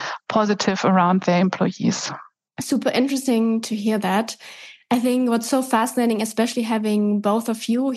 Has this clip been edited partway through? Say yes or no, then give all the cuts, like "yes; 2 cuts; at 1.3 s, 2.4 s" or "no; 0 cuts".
no; 0 cuts